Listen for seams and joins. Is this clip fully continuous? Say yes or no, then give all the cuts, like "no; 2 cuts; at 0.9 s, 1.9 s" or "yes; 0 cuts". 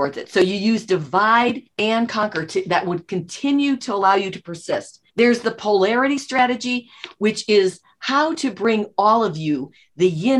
no; 2 cuts; at 1.7 s, 5.1 s